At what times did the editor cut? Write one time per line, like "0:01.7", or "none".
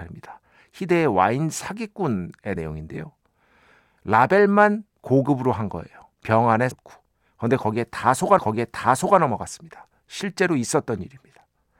0:02.6
0:04.9
0:06.1
0:06.7
0:08.4